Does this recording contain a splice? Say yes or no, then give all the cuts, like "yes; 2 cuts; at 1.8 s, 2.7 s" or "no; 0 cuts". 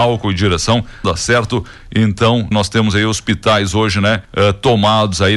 yes; 3 cuts; at 1.0 s, 2.5 s, 4.2 s